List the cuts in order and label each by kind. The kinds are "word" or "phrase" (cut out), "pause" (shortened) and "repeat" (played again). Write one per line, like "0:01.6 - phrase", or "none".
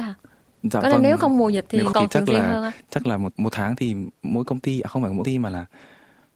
0:01.9 - phrase
0:03.3 - word
0:04.1 - pause
0:05.2 - word